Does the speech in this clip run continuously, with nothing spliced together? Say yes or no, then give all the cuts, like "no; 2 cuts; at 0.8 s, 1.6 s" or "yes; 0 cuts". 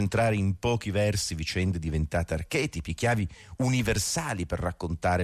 yes; 0 cuts